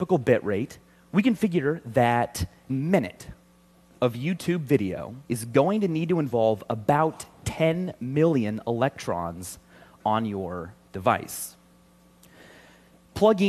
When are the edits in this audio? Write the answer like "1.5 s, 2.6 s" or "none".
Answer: 2.7 s, 5.2 s